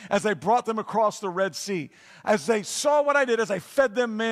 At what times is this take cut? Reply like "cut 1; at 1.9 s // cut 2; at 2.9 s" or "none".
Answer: none

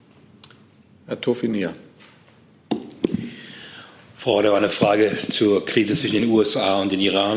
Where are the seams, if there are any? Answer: none

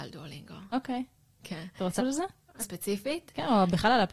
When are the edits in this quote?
cut 1; at 2.0 s // cut 2; at 2.6 s

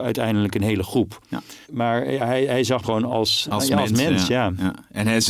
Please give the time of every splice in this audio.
cut 1; at 1.6 s // cut 2; at 2.8 s // cut 3; at 3.4 s

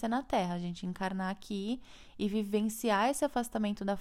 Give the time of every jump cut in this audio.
none

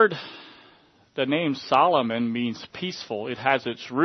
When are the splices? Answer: none

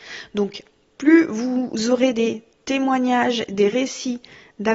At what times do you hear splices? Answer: none

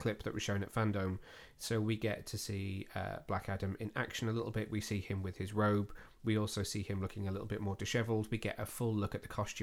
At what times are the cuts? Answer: none

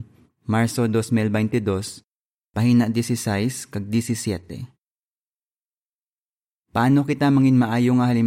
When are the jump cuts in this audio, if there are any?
none

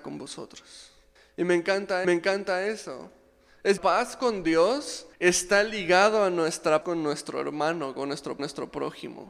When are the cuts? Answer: cut 1; at 1.2 s // cut 2; at 2.0 s // cut 3; at 3.8 s // cut 4; at 5.1 s // cut 5; at 6.8 s // cut 6; at 8.4 s

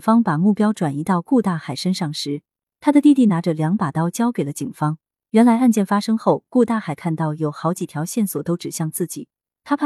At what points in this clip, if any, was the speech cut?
none

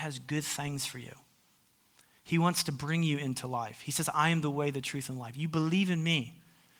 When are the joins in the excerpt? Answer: none

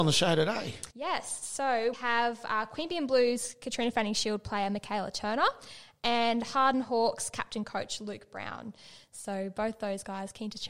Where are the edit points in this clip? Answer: cut 1; at 0.9 s // cut 2; at 1.9 s

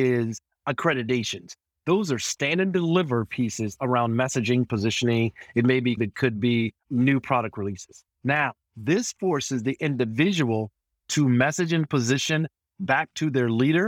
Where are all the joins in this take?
cut 1; at 6.0 s // cut 2; at 6.8 s // cut 3; at 8.1 s

